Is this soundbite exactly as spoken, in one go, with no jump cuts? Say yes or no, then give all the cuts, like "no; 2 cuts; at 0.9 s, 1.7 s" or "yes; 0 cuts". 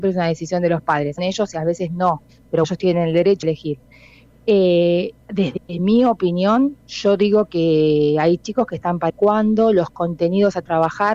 no; 6 cuts; at 1.2 s, 2.6 s, 3.4 s, 5.2 s, 6.8 s, 9.1 s